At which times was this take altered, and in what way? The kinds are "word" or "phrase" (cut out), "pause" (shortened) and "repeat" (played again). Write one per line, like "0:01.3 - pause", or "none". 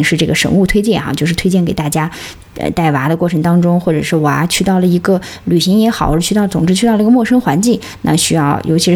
none